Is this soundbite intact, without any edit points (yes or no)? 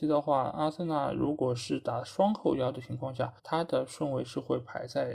no